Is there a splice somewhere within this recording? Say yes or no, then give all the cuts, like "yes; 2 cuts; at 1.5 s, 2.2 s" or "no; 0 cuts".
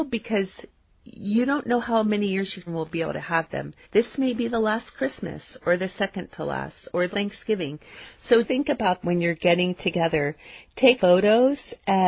yes; 6 cuts; at 2.7 s, 3.8 s, 7.1 s, 8.4 s, 9.0 s, 11.0 s